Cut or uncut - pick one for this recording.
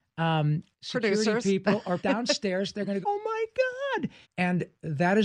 cut